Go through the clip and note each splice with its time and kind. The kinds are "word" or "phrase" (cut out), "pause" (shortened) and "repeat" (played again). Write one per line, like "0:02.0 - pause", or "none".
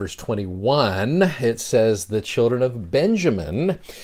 none